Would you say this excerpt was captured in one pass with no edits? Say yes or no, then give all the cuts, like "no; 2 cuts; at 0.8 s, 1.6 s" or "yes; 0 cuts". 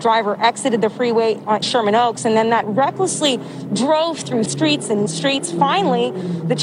no; 4 cuts; at 1.6 s, 2.6 s, 4.4 s, 5.1 s